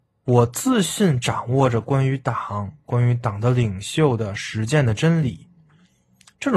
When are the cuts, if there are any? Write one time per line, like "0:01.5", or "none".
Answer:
none

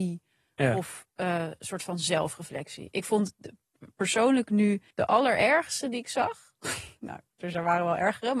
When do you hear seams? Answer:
0:04.9

